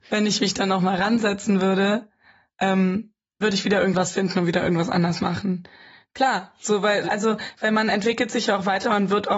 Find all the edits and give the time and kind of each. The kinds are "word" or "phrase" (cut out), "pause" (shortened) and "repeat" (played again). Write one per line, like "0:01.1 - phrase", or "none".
0:03.4 - word
0:07.0 - word

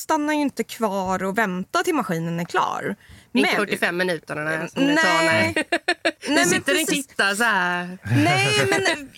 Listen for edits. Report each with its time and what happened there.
0:03.6 - phrase
0:06.9 - word

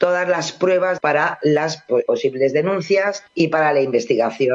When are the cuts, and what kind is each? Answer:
0:01.0 - phrase
0:02.1 - word
0:03.3 - pause

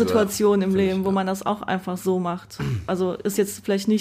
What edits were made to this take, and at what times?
none

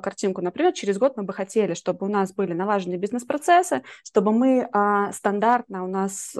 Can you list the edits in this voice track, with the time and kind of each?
none

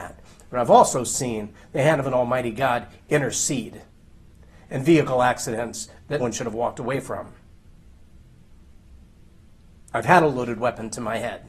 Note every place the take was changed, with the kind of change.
0:06.2 - word

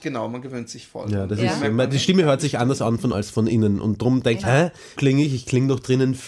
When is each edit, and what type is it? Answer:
0:03.1 - word
0:04.4 - phrase
0:05.0 - word

